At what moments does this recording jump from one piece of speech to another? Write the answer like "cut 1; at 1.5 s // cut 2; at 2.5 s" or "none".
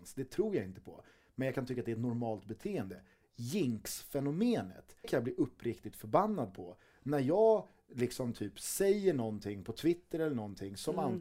cut 1; at 5.0 s